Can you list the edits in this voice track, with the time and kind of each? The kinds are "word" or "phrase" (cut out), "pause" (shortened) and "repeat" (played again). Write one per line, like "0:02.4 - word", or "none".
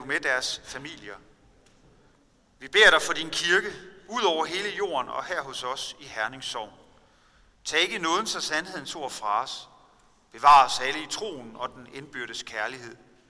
none

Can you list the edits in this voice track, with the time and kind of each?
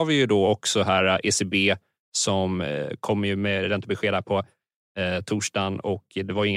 none

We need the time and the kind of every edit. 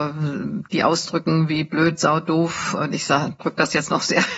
0:02.8 - word

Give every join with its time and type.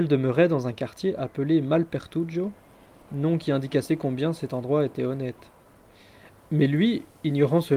none

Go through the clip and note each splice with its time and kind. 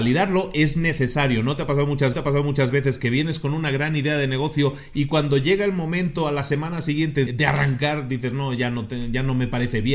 0:02.1 - repeat
0:07.3 - word

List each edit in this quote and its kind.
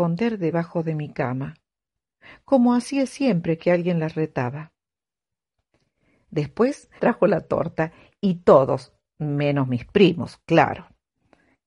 0:07.0 - word

